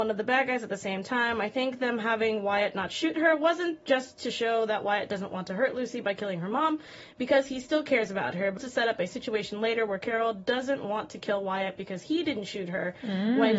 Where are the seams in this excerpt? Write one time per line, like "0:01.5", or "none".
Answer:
0:08.6